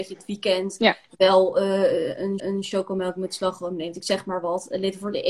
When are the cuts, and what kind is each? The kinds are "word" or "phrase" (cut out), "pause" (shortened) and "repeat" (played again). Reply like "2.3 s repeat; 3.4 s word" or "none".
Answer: 2.4 s repeat